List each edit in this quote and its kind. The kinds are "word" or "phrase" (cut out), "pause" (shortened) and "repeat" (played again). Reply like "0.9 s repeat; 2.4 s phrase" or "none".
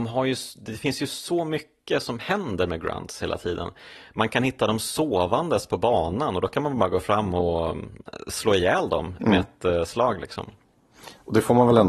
none